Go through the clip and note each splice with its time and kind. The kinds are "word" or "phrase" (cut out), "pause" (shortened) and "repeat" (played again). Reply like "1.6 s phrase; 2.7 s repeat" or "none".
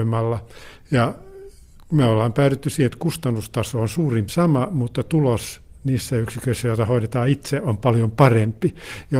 4.3 s word